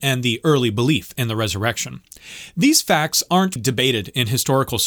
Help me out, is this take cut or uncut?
cut